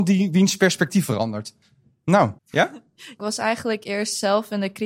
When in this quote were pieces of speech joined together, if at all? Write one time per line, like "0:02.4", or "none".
0:01.1
0:02.4
0:03.2